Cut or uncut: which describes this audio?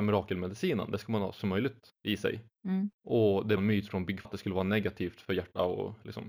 cut